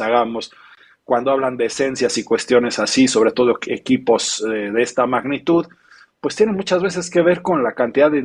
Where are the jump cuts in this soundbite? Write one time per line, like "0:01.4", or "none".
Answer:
none